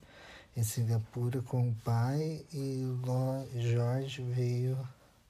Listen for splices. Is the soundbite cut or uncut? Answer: uncut